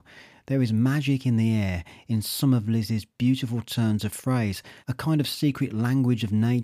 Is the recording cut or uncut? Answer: cut